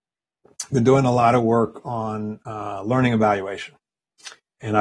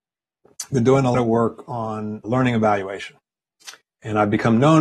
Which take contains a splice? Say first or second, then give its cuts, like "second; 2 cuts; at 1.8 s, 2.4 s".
second; 2 cuts; at 1.1 s, 2.2 s